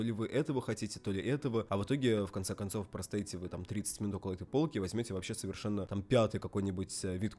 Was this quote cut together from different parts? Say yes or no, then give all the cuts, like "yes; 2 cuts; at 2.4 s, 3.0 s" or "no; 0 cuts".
no; 0 cuts